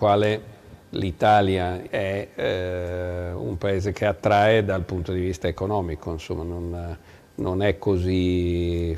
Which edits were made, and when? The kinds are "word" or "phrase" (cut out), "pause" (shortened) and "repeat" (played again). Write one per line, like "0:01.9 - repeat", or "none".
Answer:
0:01.9 - phrase